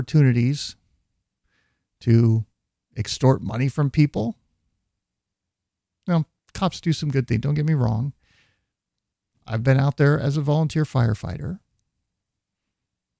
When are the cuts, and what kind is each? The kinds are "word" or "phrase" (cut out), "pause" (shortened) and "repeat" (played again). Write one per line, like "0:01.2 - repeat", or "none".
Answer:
none